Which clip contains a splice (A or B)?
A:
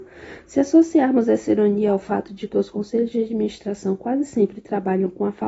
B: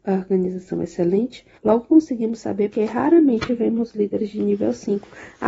B